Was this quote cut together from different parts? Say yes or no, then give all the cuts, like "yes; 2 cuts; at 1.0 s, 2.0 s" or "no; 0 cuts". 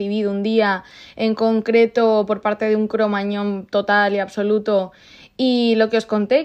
no; 0 cuts